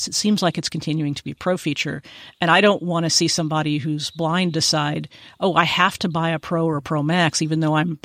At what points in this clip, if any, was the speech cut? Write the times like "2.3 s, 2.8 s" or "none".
none